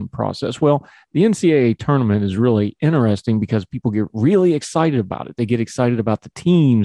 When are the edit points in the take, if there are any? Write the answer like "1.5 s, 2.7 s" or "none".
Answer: none